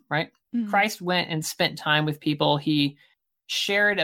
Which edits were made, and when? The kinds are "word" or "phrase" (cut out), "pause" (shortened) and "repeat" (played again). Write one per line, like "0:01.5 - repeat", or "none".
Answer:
none